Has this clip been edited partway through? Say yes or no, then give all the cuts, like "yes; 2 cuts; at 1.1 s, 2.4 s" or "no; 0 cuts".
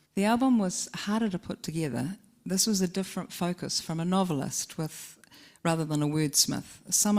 no; 0 cuts